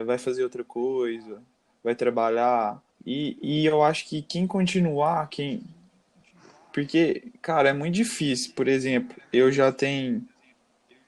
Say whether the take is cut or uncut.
cut